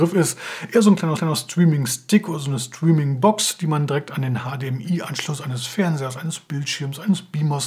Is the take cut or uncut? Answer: cut